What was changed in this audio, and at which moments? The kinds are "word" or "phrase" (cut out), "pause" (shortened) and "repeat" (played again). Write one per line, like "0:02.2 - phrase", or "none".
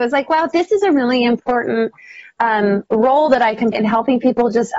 0:03.7 - word